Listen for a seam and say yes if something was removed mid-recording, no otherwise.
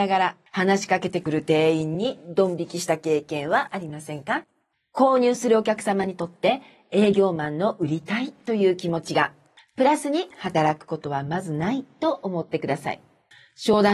no